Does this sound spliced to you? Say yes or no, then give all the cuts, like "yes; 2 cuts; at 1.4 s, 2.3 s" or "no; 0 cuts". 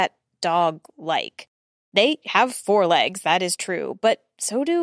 no; 0 cuts